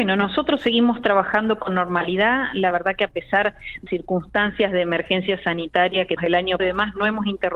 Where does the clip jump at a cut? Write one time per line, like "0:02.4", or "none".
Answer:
0:03.9
0:06.2
0:06.6